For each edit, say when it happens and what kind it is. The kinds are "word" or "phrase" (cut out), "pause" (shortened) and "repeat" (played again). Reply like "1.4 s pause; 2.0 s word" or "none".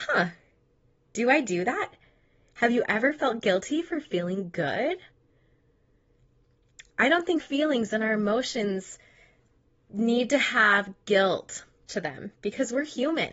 7.4 s word; 11.9 s word